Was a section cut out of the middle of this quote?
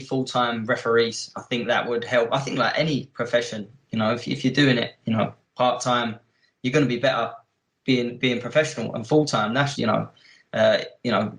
yes; 1 cut; at 9.7 s

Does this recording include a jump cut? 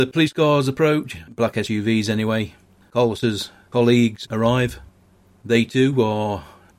no; 0 cuts

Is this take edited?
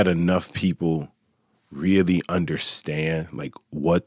no; 0 cuts

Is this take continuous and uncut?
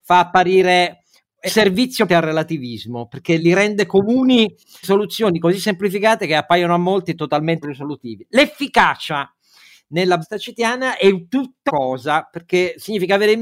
no; 7 cuts; at 1.5 s, 2.1 s, 3.4 s, 4.8 s, 7.6 s, 10.2 s, 11.7 s

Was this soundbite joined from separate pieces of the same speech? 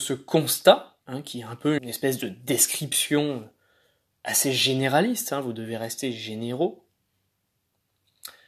yes; 2 cuts; at 1.0 s, 1.8 s

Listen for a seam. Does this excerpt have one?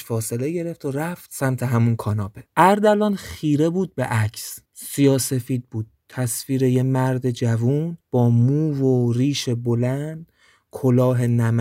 yes; 3 cuts; at 2.5 s, 4.7 s, 8.0 s

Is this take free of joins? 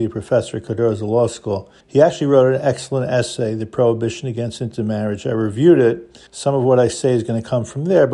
no; 2 cuts; at 1.8 s, 6.3 s

